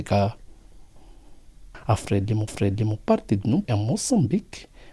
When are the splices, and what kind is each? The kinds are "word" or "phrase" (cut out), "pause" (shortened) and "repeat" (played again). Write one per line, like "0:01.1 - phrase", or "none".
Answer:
0:02.5 - repeat
0:03.6 - word